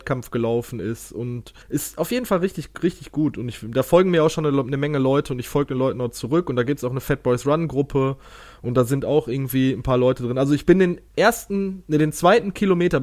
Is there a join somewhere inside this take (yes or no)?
yes